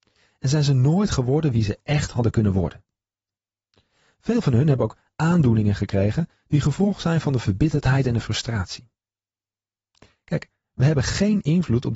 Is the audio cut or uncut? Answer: uncut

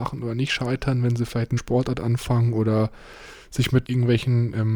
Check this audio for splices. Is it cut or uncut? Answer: cut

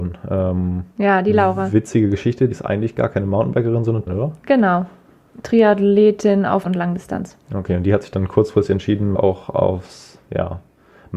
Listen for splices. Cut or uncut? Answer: cut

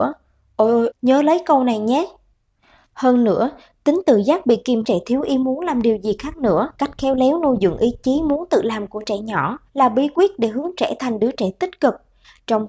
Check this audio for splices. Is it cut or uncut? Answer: cut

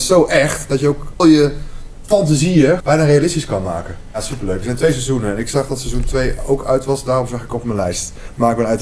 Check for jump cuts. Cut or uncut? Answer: cut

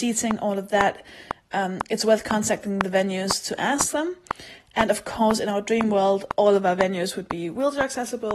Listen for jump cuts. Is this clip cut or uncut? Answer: uncut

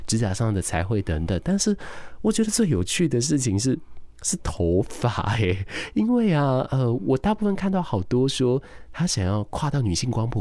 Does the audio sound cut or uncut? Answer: uncut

